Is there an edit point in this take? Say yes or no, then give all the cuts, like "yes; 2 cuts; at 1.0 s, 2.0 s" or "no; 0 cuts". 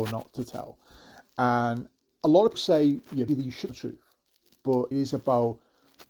yes; 5 cuts; at 2.0 s, 2.5 s, 3.3 s, 3.7 s, 4.9 s